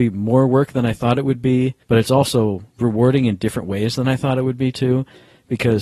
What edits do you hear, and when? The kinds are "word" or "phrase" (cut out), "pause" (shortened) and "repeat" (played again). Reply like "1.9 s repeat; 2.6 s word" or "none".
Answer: 1.8 s pause; 2.7 s pause